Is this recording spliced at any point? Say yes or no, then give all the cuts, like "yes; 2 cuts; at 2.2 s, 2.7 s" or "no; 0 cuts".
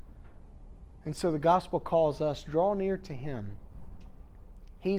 no; 0 cuts